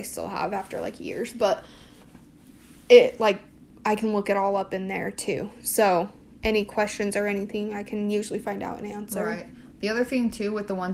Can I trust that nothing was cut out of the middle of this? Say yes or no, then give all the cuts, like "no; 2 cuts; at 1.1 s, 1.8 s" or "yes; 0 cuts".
yes; 0 cuts